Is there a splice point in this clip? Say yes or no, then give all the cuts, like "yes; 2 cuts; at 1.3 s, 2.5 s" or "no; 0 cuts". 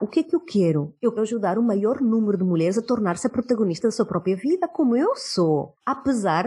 yes; 1 cut; at 1.2 s